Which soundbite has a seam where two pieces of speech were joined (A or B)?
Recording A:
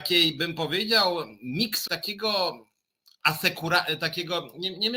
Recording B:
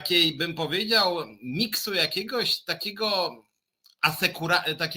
A